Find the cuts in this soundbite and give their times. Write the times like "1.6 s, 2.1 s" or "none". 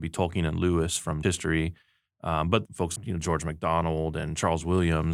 1.2 s, 2.7 s, 3.0 s